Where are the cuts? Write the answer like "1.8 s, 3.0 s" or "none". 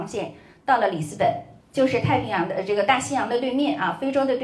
1.6 s